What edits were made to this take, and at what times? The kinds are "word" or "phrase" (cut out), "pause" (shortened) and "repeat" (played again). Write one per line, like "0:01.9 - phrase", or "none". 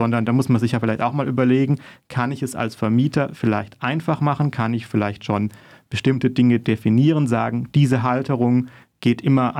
none